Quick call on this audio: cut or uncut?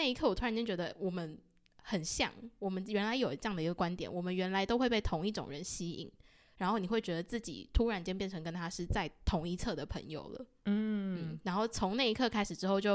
uncut